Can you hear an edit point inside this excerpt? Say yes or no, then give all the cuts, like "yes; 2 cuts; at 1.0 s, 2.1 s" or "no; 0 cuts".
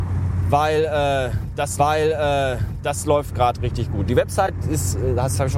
yes; 1 cut; at 1.8 s